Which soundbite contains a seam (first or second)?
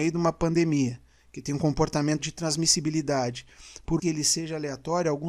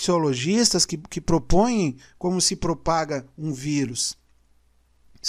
first